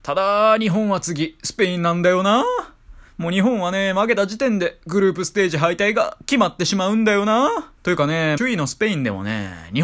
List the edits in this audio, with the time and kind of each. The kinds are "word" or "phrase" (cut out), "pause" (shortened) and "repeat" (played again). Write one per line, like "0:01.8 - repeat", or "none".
0:03.1 - pause
0:07.8 - pause
0:08.4 - phrase